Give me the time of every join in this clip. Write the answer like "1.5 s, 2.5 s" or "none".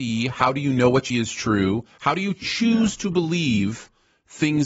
1.1 s